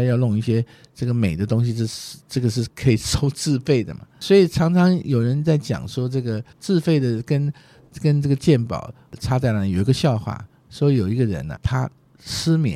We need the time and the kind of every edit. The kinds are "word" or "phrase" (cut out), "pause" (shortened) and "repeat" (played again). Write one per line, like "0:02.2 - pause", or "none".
0:06.5 - pause
0:11.6 - word